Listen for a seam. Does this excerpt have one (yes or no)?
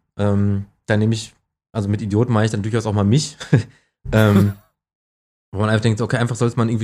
no